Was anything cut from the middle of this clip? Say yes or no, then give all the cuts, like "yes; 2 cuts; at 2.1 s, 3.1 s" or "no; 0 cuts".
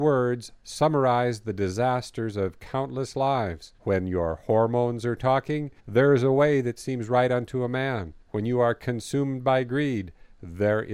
yes; 3 cuts; at 3.8 s, 5.8 s, 8.2 s